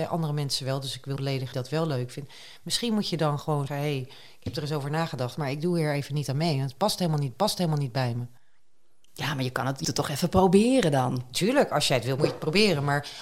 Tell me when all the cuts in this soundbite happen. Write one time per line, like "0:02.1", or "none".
0:01.2
0:01.5
0:03.7
0:07.3
0:09.8
0:12.2

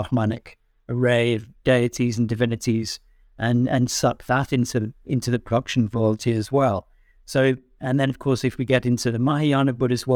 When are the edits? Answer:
none

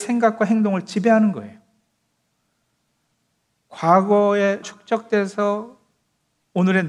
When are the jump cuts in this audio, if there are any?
0:04.6

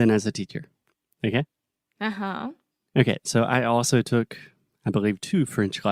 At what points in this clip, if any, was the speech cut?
none

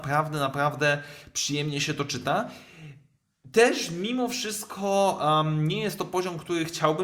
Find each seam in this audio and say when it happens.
none

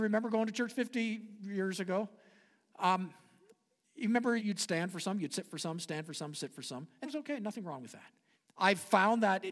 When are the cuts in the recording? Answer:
0:04.4
0:07.0
0:08.3

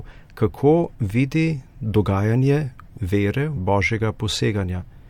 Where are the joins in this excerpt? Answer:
0:02.9
0:03.6

